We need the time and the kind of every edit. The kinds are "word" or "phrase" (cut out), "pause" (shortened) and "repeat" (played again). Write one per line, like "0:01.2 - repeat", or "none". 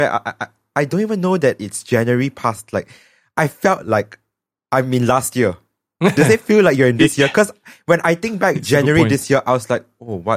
none